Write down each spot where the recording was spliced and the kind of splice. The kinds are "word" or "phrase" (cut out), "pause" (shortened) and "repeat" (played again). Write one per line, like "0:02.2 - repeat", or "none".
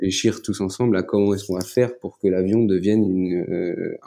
none